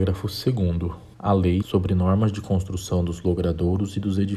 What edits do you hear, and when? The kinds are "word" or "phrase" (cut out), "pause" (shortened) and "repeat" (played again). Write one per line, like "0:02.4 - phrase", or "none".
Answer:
0:01.1 - word
0:01.6 - word